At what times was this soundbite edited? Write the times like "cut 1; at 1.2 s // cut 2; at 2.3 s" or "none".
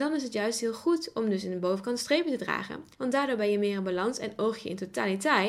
cut 1; at 2.9 s